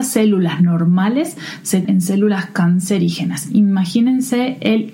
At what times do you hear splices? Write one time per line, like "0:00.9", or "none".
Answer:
0:01.8